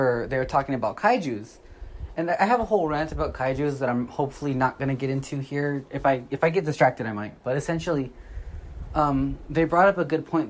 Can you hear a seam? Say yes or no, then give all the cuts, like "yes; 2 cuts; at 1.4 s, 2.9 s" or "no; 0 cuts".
no; 0 cuts